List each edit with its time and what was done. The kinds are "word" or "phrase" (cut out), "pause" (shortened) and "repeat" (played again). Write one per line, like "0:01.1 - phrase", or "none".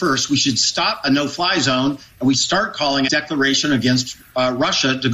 0:01.0 - phrase
0:02.3 - word
0:03.1 - word